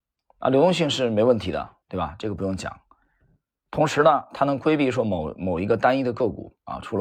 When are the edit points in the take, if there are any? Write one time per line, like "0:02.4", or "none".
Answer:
0:01.8